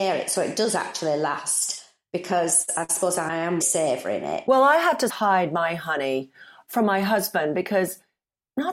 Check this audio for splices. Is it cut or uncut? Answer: cut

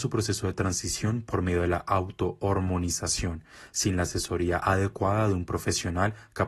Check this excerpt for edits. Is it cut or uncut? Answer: uncut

